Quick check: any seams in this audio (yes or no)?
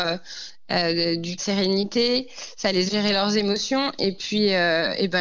yes